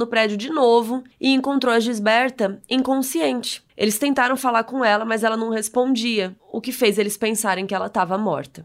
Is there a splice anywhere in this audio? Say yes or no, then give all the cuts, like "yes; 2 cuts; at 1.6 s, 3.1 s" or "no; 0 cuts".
yes; 3 cuts; at 1.1 s, 3.7 s, 6.4 s